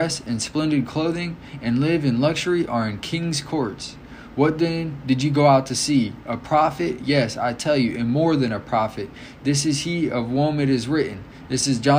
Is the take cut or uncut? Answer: uncut